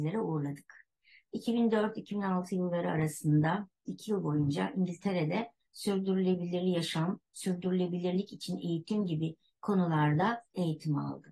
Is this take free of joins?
yes; 0 cuts

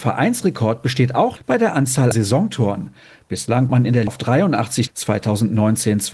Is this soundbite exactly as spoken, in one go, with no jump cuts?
no; 5 cuts; at 1.4 s, 2.1 s, 3.7 s, 4.1 s, 4.9 s

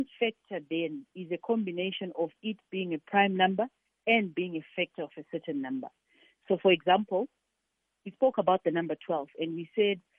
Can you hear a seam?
no; 0 cuts

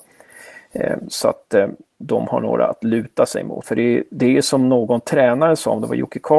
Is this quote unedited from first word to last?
yes; 0 cuts

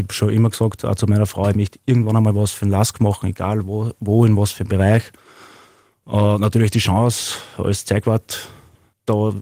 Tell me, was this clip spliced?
no; 0 cuts

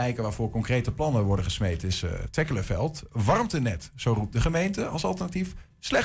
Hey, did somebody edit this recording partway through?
no; 0 cuts

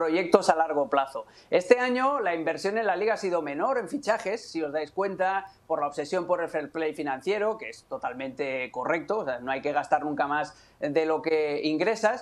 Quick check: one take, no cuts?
yes; 0 cuts

